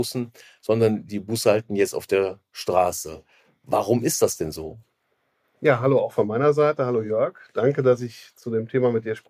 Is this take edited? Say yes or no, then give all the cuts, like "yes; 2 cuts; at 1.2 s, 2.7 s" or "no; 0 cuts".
no; 0 cuts